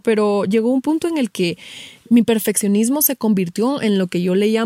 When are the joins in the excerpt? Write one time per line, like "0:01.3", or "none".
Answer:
none